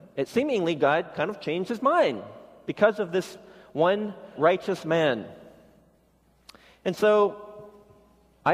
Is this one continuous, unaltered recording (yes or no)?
no